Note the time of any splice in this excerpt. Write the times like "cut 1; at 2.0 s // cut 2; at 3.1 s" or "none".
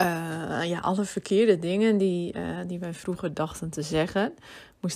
none